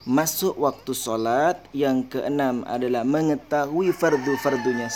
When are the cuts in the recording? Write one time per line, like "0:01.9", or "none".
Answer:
none